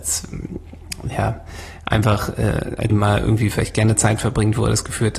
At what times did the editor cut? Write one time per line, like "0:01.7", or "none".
0:02.9